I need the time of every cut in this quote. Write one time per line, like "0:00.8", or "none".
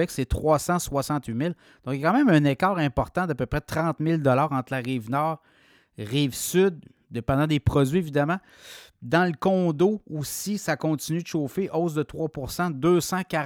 none